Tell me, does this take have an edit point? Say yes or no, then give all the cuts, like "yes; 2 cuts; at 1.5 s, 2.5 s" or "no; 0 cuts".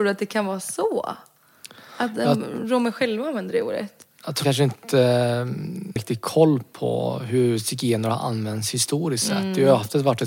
yes; 2 cuts; at 4.4 s, 6.0 s